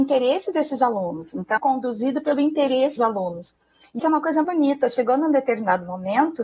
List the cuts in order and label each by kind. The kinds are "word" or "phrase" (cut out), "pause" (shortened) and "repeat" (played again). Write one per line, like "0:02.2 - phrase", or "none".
0:01.6 - phrase
0:03.0 - word
0:04.0 - word
0:04.4 - word